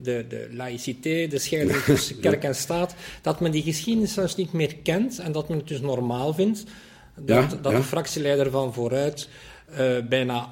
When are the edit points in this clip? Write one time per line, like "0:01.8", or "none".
none